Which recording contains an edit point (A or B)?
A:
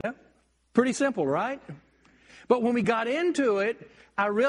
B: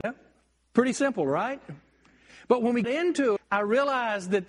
B